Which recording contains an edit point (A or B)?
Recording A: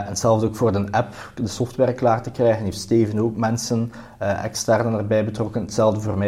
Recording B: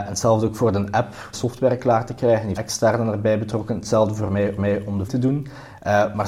B